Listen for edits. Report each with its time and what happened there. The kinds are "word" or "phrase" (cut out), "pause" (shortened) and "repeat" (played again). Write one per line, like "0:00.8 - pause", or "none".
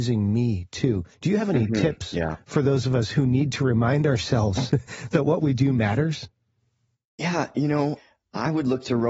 0:01.1 - pause